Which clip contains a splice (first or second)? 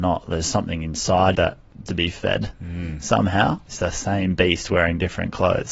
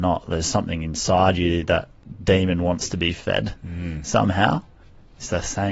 first